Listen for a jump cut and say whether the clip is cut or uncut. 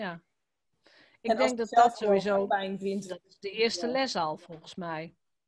uncut